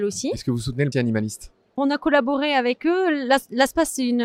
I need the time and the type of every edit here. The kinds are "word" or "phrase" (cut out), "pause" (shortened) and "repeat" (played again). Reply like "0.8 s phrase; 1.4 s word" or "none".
0.9 s word; 1.8 s word